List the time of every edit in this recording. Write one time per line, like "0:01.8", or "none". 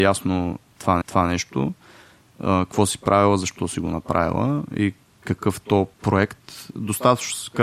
0:01.0
0:05.9